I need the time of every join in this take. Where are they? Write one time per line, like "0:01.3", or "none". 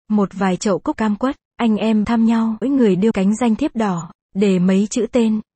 0:00.9
0:01.4
0:02.0
0:02.6
0:03.1